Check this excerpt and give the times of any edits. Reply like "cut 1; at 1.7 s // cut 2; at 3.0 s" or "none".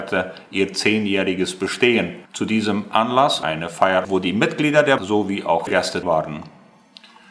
cut 1; at 2.2 s // cut 2; at 3.4 s // cut 3; at 4.0 s // cut 4; at 5.0 s // cut 5; at 5.7 s // cut 6; at 6.0 s